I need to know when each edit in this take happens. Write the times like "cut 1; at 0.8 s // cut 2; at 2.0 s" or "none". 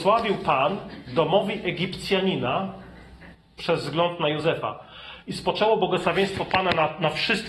none